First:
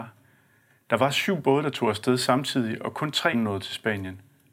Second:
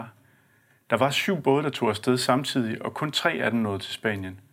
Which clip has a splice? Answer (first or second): first